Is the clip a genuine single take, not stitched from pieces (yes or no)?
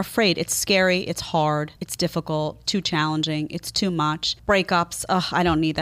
no